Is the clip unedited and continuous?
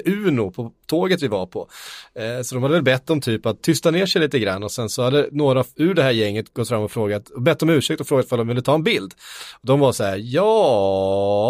no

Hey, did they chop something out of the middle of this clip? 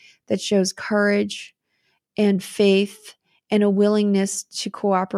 no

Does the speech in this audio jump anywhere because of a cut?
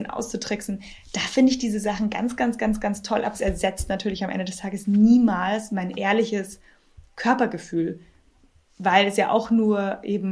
no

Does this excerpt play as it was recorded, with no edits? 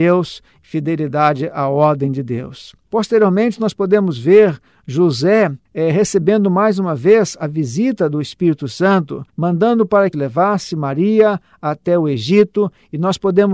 no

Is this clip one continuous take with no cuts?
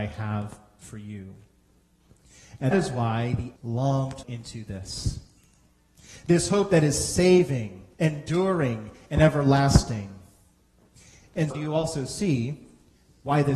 no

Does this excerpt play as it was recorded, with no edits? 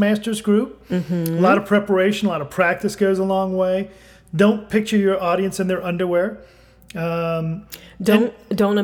yes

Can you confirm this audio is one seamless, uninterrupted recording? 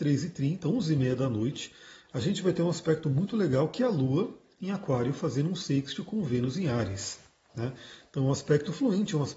yes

